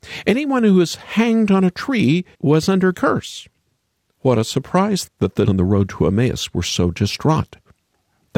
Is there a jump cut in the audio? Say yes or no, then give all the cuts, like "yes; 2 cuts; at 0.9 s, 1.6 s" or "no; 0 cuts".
yes; 4 cuts; at 2.3 s, 2.9 s, 5.1 s, 5.5 s